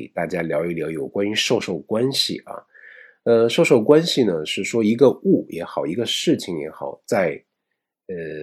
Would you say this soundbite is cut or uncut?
uncut